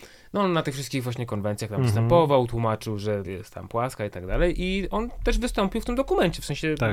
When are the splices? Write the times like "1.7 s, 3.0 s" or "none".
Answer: 3.2 s